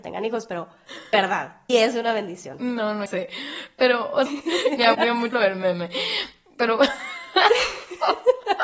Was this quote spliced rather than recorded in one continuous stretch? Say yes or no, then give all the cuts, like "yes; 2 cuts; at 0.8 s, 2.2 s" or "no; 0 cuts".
yes; 6 cuts; at 1.1 s, 1.7 s, 3.1 s, 4.3 s, 4.9 s, 5.3 s